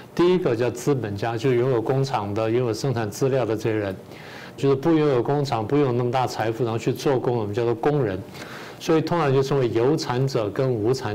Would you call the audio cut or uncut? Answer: cut